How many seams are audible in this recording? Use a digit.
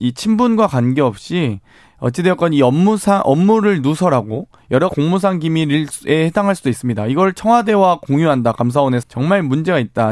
2